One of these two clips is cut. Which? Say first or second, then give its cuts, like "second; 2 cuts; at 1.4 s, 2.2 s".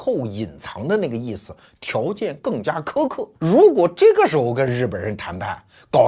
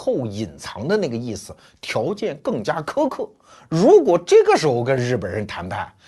first; 1 cut; at 3.4 s